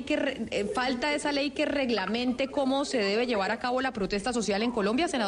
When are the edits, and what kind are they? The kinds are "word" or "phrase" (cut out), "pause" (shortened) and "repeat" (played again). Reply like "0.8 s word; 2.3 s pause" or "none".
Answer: none

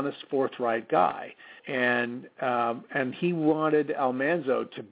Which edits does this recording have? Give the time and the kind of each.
1.6 s pause

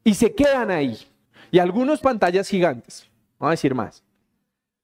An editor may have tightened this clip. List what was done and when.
1.2 s pause; 2.0 s word; 3.3 s pause

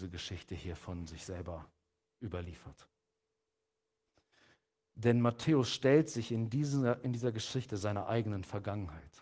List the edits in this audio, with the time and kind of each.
none

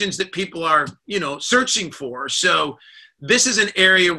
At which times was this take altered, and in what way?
none

